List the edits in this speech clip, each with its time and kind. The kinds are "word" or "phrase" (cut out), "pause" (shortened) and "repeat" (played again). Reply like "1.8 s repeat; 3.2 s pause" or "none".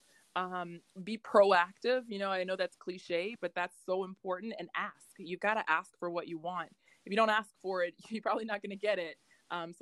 3.4 s word